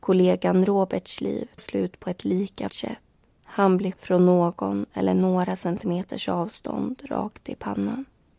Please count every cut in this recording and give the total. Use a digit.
3